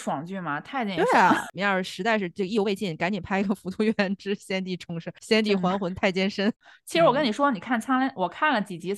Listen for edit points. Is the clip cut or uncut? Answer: uncut